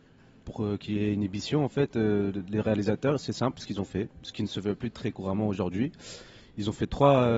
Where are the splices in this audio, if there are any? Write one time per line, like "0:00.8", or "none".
none